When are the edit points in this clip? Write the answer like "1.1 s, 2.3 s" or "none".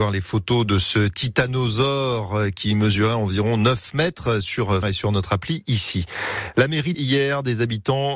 4.8 s, 6.9 s